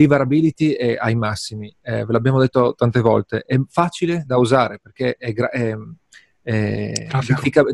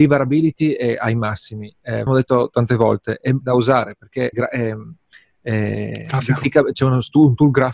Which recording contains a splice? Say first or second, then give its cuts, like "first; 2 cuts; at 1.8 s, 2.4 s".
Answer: second; 3 cuts; at 2.1 s, 3.4 s, 4.3 s